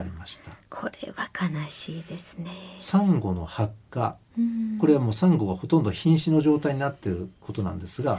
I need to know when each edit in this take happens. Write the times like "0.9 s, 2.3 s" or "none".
none